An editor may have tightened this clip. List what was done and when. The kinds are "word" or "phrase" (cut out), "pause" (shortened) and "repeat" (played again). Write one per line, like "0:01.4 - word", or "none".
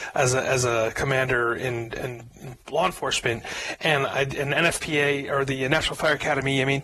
none